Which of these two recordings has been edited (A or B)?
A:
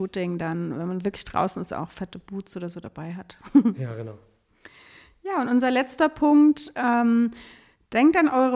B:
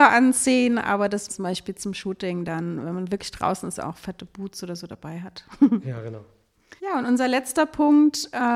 B